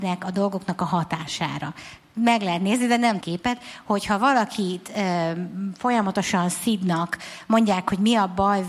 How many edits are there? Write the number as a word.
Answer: one